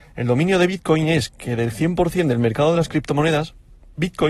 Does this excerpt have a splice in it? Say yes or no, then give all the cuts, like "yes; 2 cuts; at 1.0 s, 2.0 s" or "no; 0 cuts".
no; 0 cuts